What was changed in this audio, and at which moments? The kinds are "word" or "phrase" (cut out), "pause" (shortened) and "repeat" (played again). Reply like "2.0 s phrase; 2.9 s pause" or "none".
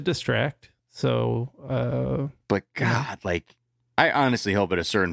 none